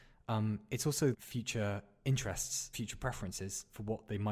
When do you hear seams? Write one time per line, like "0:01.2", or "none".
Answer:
0:01.1
0:02.7